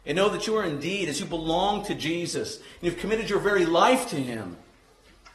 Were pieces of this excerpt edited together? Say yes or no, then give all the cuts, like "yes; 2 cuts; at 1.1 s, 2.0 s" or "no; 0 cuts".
no; 0 cuts